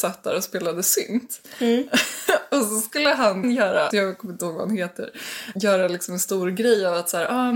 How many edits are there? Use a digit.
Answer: 3